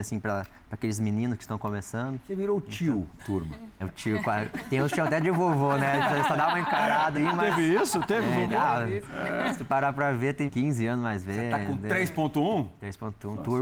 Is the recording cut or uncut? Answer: cut